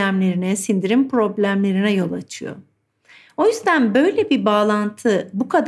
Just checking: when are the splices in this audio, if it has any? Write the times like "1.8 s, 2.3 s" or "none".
none